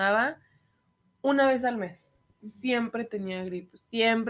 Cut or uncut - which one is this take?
uncut